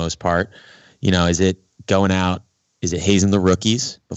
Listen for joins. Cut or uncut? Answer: uncut